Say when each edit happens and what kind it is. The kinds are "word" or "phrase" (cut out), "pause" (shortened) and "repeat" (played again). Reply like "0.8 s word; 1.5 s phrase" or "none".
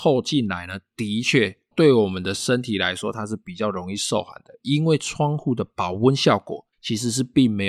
1.7 s word; 6.7 s pause

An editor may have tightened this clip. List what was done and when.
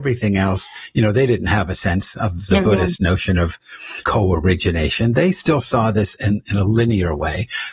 4.0 s word

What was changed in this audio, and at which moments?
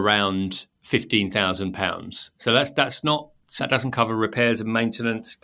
3.6 s word

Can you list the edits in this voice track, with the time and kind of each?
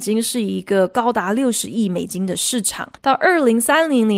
3.0 s pause

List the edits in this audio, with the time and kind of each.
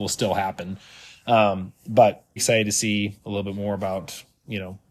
2.4 s word

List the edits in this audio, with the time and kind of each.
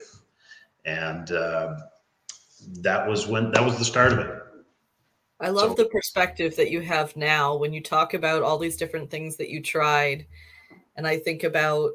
none

